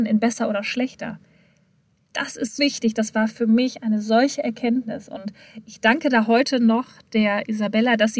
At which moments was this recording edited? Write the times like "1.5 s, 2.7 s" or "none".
2.6 s